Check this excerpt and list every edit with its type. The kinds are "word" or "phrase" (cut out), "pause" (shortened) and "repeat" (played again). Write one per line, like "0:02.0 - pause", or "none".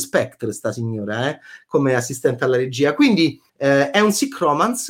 0:03.5 - pause